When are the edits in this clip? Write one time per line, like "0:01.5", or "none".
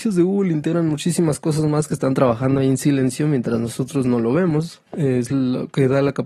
0:04.9